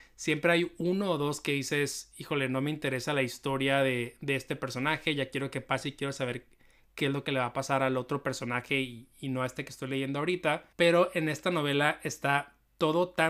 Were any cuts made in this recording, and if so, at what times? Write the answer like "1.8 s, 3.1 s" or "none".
10.7 s